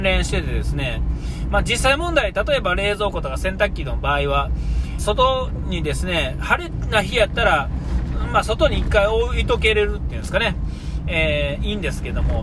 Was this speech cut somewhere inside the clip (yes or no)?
yes